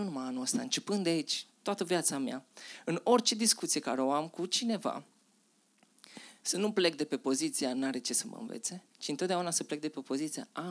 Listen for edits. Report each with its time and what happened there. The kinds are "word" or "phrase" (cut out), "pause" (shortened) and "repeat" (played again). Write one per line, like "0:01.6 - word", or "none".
0:08.9 - pause